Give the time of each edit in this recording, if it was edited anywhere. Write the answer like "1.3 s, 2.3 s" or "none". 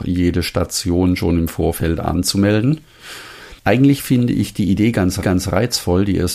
3.6 s, 5.2 s